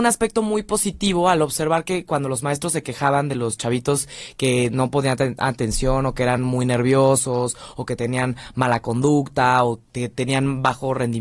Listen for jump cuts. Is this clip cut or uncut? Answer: uncut